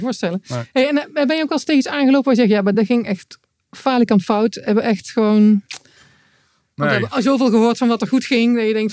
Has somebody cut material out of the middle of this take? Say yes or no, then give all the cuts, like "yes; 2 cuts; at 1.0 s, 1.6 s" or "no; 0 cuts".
no; 0 cuts